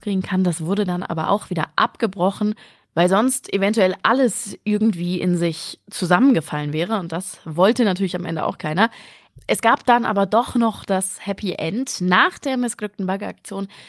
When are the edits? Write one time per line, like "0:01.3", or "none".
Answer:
none